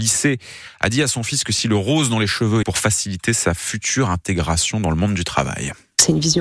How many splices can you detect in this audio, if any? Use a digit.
1